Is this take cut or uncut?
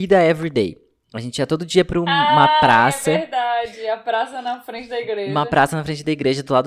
uncut